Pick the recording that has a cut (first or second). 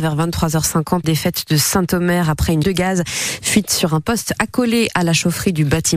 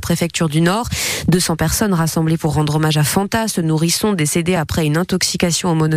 first